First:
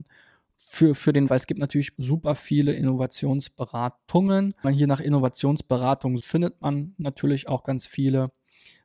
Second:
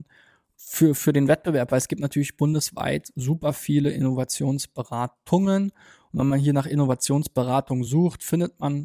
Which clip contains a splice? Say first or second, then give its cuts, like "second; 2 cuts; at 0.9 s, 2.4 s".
first; 4 cuts; at 1.3 s, 2.0 s, 4.6 s, 6.2 s